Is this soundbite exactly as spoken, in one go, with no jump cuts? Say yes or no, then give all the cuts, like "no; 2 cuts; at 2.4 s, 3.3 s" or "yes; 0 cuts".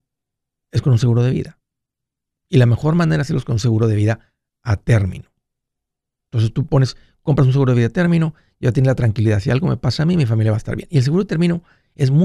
yes; 0 cuts